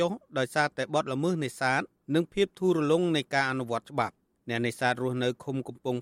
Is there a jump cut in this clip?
no; 0 cuts

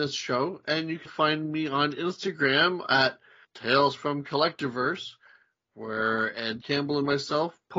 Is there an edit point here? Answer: yes; 3 cuts; at 1.1 s, 3.4 s, 6.6 s

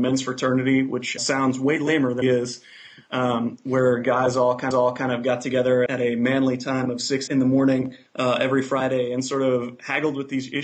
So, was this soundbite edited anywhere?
yes; 6 cuts; at 1.2 s, 2.2 s, 4.7 s, 5.9 s, 7.3 s, 8.1 s

